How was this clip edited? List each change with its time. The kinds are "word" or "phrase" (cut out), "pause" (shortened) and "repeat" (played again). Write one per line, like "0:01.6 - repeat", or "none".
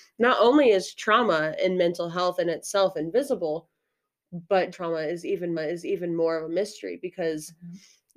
0:04.7 - word
0:05.6 - repeat